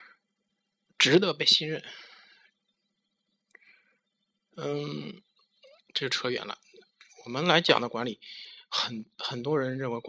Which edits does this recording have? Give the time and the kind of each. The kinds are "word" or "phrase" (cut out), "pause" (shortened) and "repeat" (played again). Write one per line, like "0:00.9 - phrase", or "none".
none